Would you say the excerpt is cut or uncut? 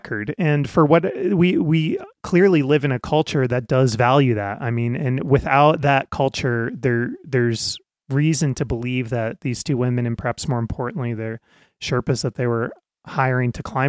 uncut